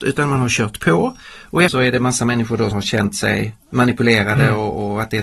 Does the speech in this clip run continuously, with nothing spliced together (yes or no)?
no